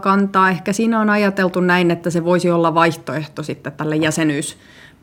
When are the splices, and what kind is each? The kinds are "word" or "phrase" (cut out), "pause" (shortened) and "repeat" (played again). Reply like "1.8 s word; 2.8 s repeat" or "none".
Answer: none

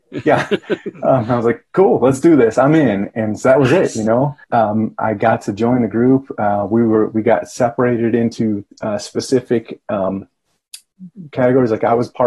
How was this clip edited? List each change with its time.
4.4 s pause; 8.7 s pause

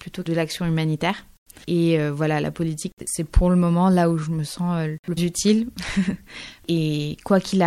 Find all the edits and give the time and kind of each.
5.2 s word

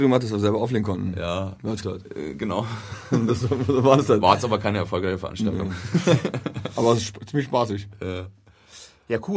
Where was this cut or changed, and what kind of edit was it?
1.8 s phrase

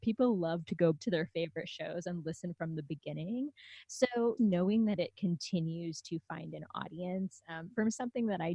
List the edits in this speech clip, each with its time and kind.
0.9 s word; 4.4 s word

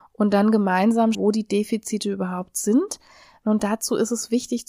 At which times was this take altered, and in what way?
1.1 s word

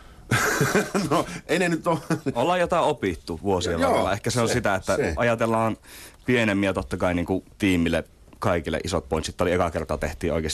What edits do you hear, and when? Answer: 7.5 s pause

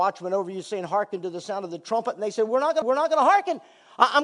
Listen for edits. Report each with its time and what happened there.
2.8 s repeat

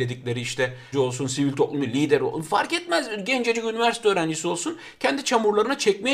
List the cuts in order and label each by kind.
0.9 s phrase; 1.8 s word

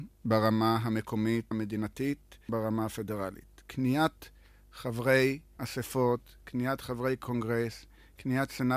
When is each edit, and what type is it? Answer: 1.5 s word; 2.5 s word; 5.6 s word

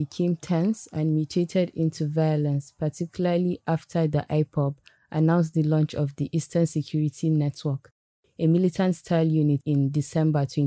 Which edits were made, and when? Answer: none

